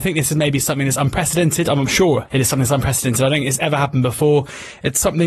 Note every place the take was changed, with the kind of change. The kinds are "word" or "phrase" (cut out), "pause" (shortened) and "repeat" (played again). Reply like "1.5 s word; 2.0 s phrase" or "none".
2.3 s word